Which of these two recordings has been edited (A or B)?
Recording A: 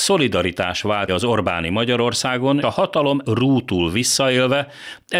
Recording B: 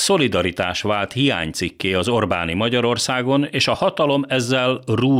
A